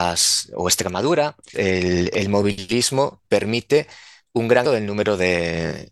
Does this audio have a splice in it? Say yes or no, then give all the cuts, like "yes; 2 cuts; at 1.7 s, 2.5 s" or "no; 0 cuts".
yes; 3 cuts; at 1.5 s, 3.2 s, 4.6 s